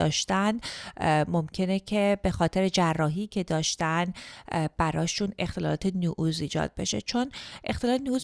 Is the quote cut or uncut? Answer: uncut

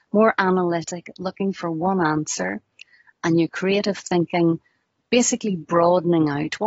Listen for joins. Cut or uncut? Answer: uncut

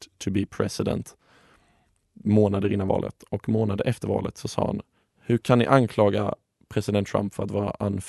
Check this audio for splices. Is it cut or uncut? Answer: uncut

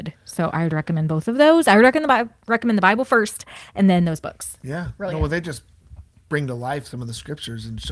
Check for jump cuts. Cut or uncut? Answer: uncut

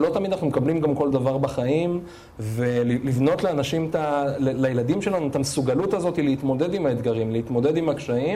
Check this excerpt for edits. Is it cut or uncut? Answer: uncut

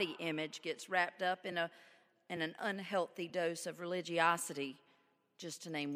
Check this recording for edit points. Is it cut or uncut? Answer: uncut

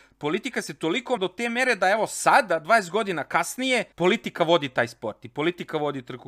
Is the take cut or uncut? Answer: cut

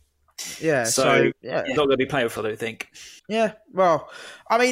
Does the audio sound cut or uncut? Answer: cut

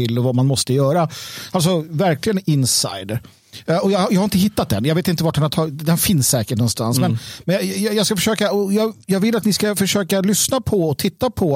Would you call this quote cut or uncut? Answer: uncut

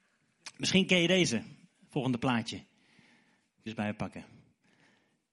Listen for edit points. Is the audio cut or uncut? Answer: cut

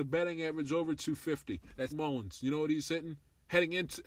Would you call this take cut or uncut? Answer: cut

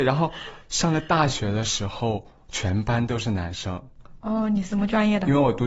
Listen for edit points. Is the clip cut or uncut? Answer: uncut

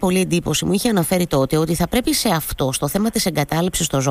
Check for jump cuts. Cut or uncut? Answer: uncut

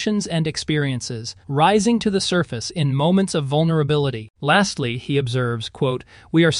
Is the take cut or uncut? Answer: cut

